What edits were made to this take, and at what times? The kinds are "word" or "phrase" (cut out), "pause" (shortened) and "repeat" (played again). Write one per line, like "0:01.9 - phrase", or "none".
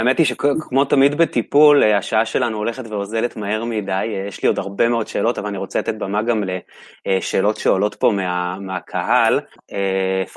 none